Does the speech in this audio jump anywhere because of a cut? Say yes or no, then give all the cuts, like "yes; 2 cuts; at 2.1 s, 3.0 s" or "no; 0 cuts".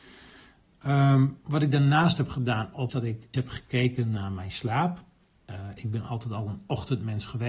yes; 2 cuts; at 2.9 s, 3.3 s